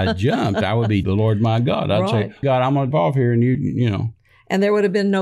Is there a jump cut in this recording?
yes; 4 cuts; at 1.0 s, 2.4 s, 2.9 s, 3.5 s

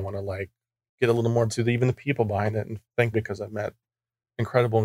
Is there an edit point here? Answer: yes; 2 cuts; at 1.5 s, 3.1 s

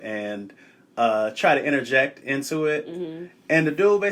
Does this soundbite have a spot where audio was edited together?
no; 0 cuts

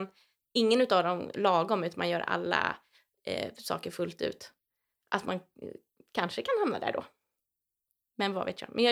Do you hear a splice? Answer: no; 0 cuts

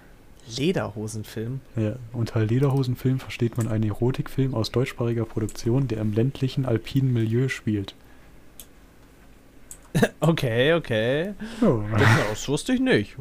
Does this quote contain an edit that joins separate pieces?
yes; 1 cut; at 1.7 s

